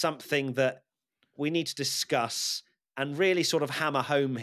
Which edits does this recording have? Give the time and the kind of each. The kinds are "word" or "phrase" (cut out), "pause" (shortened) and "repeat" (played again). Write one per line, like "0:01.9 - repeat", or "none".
none